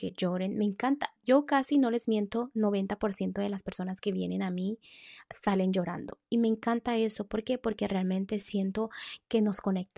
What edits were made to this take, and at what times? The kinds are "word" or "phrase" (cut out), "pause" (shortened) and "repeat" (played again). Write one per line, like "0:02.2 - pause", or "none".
0:01.2 - pause